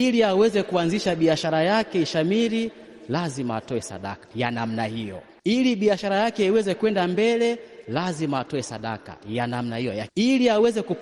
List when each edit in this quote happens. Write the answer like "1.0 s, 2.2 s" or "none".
10.1 s